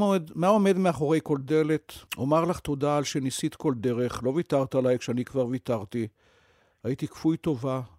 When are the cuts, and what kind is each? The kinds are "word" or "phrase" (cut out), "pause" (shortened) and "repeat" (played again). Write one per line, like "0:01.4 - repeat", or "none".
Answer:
0:02.1 - pause